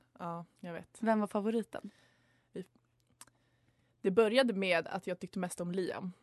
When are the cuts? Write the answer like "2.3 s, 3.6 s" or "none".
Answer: none

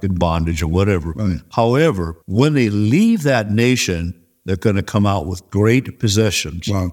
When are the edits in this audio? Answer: 2.2 s

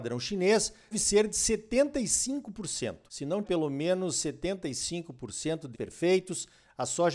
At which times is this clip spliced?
0.9 s, 3.4 s, 5.7 s

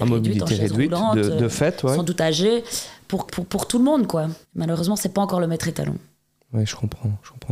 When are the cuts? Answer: 3.3 s, 4.4 s

